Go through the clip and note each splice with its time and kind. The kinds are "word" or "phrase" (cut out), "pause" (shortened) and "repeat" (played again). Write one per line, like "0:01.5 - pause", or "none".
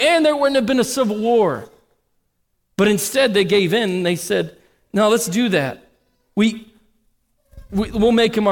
none

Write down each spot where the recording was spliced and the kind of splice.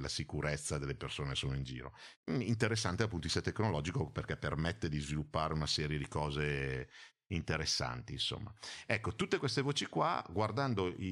0:02.2 - pause

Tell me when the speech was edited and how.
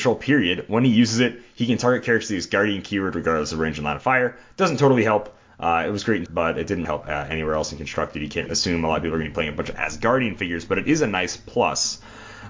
0:06.3 - phrase
0:06.8 - word
0:08.5 - word

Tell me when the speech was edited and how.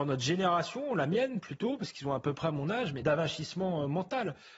0:03.0 - phrase

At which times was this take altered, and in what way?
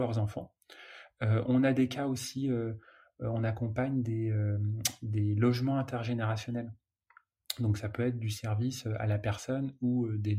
none

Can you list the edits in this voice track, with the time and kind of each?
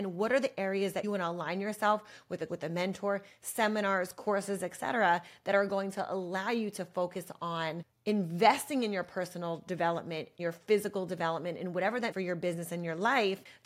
0:01.0 - word
0:02.5 - word
0:10.4 - word
0:12.1 - word

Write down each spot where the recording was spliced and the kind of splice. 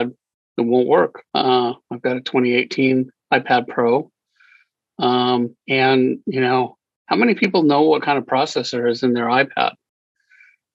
0:01.3 - pause
0:03.2 - pause
0:05.6 - pause

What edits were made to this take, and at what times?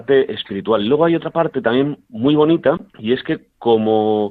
0:02.9 - pause

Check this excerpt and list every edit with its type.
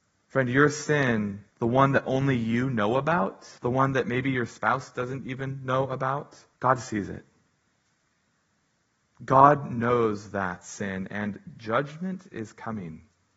0:01.5 - pause
0:03.6 - pause
0:06.5 - pause

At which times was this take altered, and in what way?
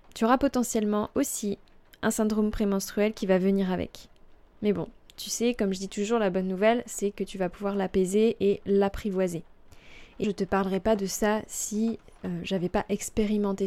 0:10.2 - word

